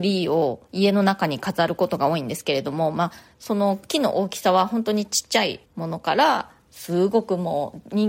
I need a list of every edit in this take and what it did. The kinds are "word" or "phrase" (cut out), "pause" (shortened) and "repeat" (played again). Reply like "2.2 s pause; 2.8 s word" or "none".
5.7 s pause